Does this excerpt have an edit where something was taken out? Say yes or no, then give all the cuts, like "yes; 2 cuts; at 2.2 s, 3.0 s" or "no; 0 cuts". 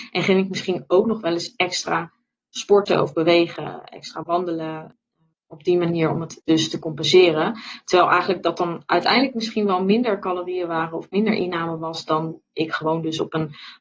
no; 0 cuts